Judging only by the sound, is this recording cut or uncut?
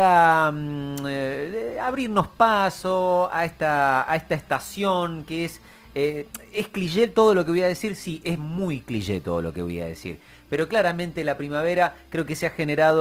uncut